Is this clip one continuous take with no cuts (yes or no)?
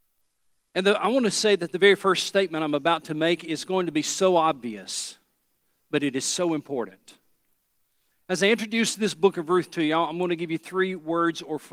yes